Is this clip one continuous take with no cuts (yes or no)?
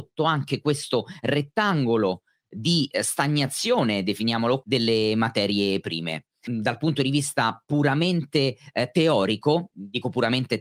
no